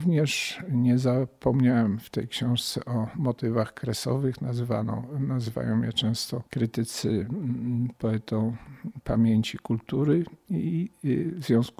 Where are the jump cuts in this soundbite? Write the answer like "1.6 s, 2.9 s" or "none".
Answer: none